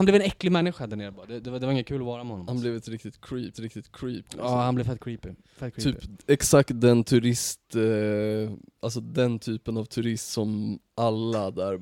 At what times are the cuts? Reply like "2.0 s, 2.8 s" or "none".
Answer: 3.5 s